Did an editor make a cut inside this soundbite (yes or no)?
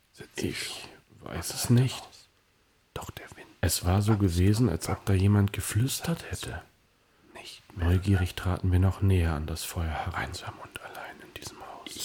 no